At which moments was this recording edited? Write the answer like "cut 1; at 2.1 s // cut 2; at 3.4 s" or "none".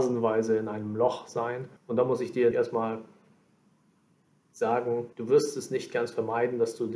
cut 1; at 1.8 s // cut 2; at 2.5 s // cut 3; at 5.1 s